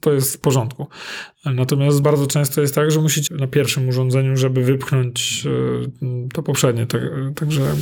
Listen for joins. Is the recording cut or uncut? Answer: cut